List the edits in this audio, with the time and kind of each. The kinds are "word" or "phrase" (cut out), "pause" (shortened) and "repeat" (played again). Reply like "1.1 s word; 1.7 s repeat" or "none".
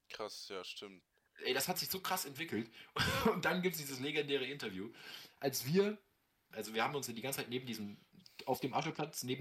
6.5 s phrase

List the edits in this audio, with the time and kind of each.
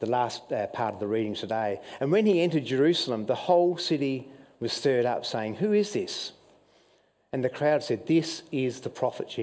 none

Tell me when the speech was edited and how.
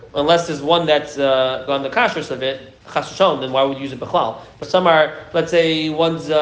1.2 s word; 1.7 s word; 2.8 s pause; 4.6 s word

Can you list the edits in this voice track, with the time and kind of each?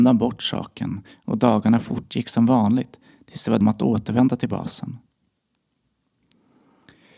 3.6 s phrase

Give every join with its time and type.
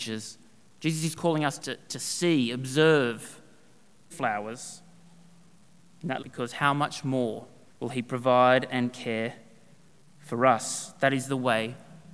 1.6 s word; 4.1 s phrase; 6.2 s phrase; 7.7 s pause

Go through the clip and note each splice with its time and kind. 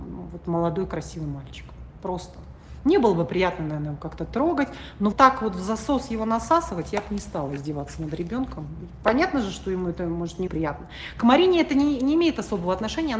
5.1 s word; 10.5 s word

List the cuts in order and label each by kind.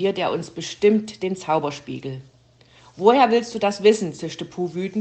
none

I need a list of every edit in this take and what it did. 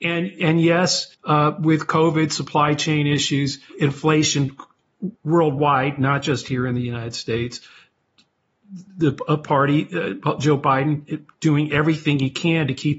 1.1 s pause; 5.1 s pause; 8.9 s pause

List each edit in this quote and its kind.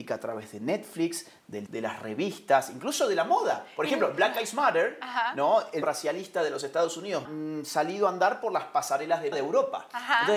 1.7 s word; 5.8 s word; 7.2 s phrase; 9.3 s word

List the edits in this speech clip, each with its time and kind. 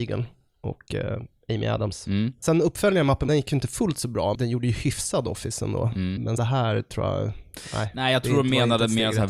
3.3 s phrase; 6.4 s word

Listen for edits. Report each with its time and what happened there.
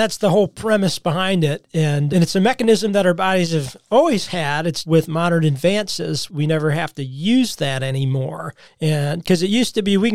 4.8 s word; 6.3 s word; 8.7 s pause

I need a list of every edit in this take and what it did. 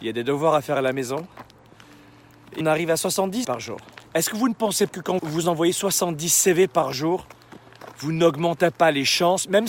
2.6 s word; 3.4 s word; 4.1 s pause; 4.9 s word; 5.2 s word

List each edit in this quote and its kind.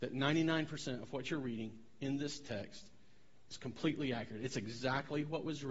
none

